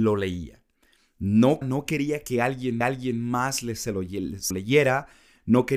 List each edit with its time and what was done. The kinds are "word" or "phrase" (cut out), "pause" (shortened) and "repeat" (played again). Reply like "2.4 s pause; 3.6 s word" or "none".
1.6 s word; 2.8 s repeat; 4.5 s word